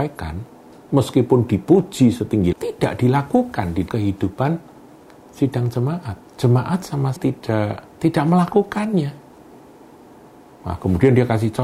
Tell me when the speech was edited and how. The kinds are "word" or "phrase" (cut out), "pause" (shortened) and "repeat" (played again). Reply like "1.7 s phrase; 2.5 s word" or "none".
2.5 s word; 3.9 s word; 6.3 s pause; 7.2 s word; 7.9 s pause